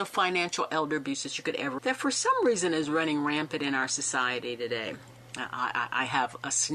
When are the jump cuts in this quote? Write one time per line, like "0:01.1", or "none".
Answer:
0:01.8